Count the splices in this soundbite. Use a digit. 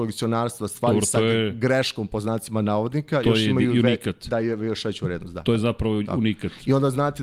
0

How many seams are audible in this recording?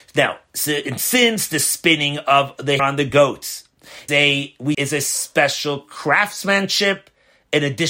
3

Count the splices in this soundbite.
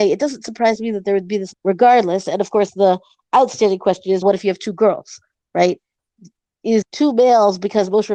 3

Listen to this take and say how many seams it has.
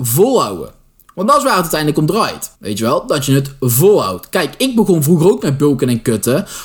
1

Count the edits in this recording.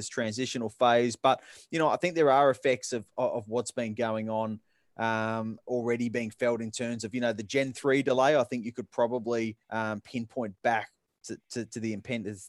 1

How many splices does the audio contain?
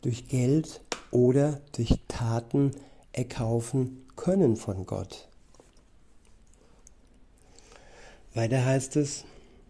0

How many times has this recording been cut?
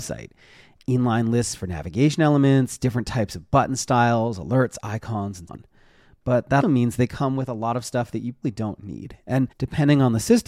4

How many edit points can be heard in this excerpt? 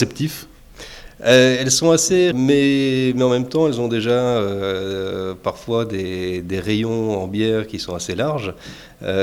1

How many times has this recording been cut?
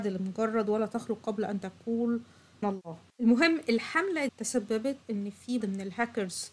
4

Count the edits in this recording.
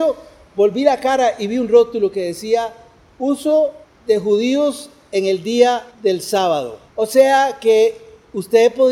3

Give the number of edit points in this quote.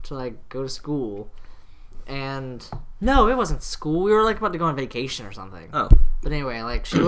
0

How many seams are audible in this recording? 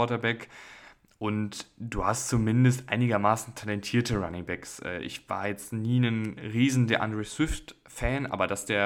0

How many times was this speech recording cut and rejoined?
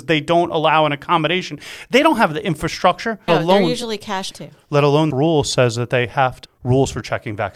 4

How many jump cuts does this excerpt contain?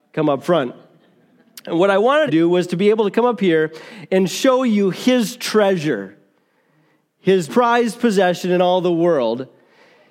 2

